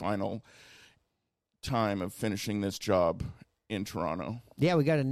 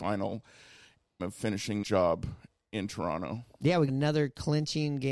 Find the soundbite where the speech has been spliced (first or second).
second